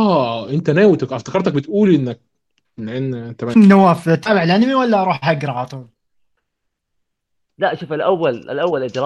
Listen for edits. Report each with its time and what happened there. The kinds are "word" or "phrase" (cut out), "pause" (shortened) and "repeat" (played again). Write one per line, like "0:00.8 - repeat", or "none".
0:03.5 - word

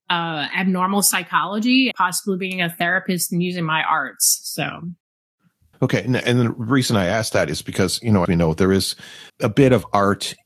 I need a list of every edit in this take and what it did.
0:01.9 - word
0:05.7 - word
0:08.3 - word
0:09.3 - pause

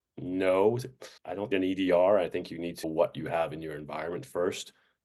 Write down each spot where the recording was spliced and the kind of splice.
0:01.2 - pause
0:01.5 - phrase
0:02.8 - word

